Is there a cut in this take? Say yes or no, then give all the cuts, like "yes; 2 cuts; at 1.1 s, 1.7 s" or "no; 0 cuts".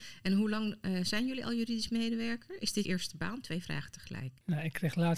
yes; 1 cut; at 2.8 s